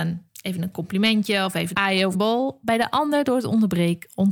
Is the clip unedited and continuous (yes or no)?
no